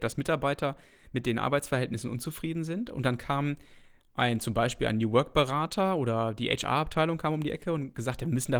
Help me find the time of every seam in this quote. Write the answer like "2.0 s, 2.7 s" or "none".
none